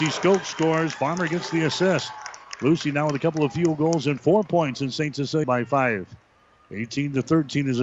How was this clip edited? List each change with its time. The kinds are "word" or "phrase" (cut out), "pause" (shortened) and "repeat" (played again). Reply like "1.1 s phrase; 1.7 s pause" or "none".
5.4 s phrase

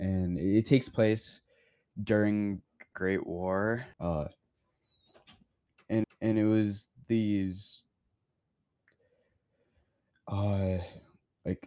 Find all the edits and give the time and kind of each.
2.9 s word; 3.9 s pause; 6.0 s repeat

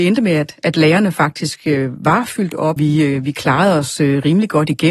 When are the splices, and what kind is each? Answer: 2.8 s word

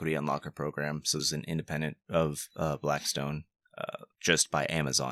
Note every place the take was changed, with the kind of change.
1.2 s word; 4.1 s pause

